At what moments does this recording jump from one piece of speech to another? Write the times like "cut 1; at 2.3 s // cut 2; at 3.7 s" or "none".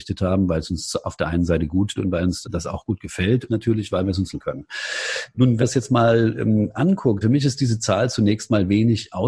cut 1; at 2.0 s // cut 2; at 2.4 s // cut 3; at 3.5 s // cut 4; at 4.3 s // cut 5; at 5.6 s // cut 6; at 7.2 s

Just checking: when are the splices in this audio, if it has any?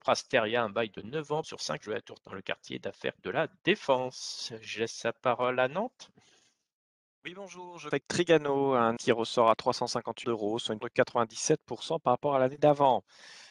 cut 1; at 1.4 s // cut 2; at 1.8 s // cut 3; at 2.2 s // cut 4; at 3.2 s // cut 5; at 7.9 s // cut 6; at 9.0 s // cut 7; at 10.2 s // cut 8; at 10.8 s

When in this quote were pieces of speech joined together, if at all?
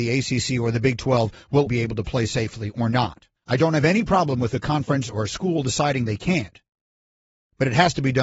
cut 1; at 1.7 s // cut 2; at 3.4 s

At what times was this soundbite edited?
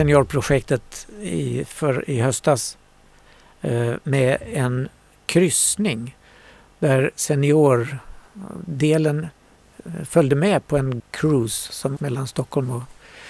cut 1; at 11.0 s // cut 2; at 12.0 s

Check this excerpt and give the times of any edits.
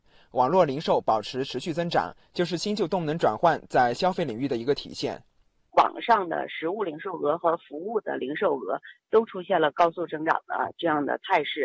none

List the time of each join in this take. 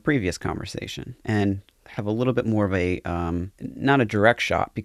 cut 1; at 1.2 s // cut 2; at 3.5 s

